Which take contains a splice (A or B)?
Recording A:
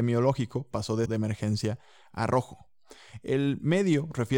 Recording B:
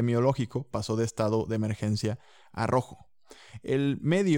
A